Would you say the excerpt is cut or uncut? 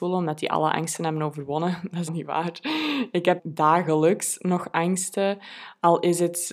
cut